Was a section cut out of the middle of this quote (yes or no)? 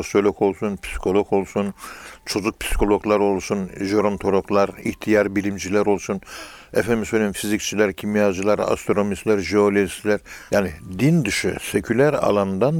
yes